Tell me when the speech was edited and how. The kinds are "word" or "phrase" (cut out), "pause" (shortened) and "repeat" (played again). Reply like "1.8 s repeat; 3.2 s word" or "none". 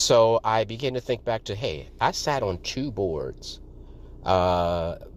none